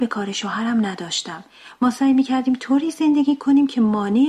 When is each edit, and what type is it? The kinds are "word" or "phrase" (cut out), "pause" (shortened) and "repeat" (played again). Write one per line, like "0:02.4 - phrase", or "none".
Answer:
none

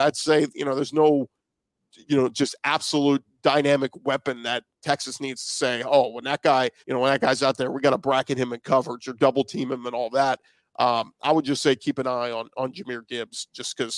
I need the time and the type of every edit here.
0:06.8 - pause

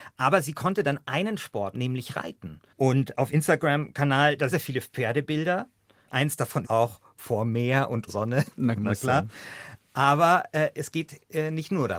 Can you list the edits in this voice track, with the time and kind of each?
0:01.7 - word
0:03.3 - word
0:04.5 - phrase
0:06.6 - word
0:08.1 - word
0:08.8 - word

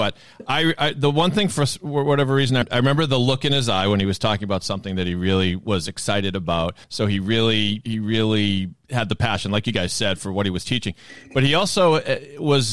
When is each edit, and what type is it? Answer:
0:06.8 - pause

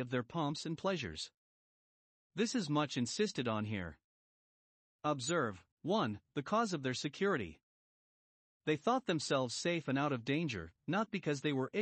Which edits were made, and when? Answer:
0:05.7 - pause

